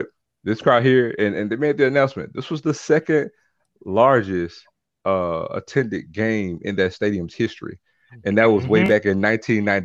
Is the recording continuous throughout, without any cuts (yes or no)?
yes